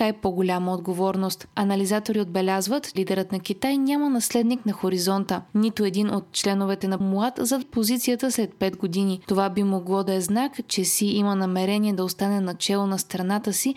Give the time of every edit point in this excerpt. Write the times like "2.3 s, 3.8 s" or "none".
3.0 s, 7.0 s, 7.6 s